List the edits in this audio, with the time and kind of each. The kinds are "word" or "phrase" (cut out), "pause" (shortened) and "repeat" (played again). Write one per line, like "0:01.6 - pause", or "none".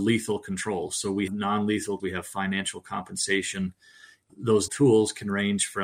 0:01.3 - word
0:02.0 - word
0:04.3 - word
0:04.7 - word